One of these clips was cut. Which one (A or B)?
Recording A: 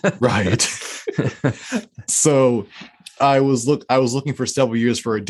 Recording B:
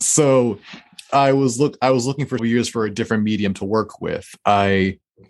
B